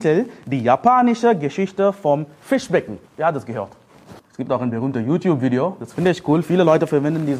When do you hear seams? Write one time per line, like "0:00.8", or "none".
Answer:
0:03.1
0:04.2